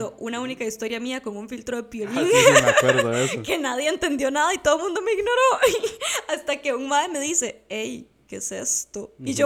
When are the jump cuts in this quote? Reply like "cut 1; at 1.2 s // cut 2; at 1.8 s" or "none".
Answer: none